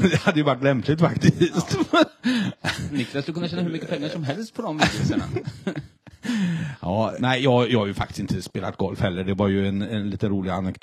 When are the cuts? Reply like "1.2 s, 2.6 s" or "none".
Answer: 7.2 s